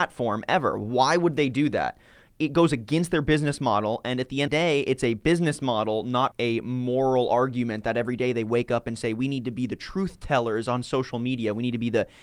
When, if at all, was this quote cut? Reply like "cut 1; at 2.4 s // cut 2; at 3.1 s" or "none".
cut 1; at 4.5 s // cut 2; at 6.3 s